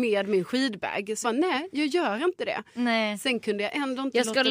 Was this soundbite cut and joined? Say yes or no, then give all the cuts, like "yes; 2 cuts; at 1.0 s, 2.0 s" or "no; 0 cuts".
yes; 1 cut; at 1.2 s